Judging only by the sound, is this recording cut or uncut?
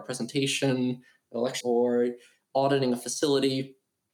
cut